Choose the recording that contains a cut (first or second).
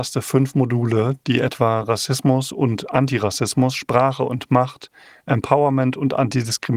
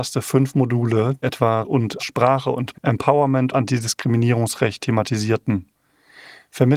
second